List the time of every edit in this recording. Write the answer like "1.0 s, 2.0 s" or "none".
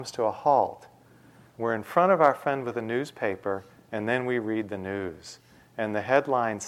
none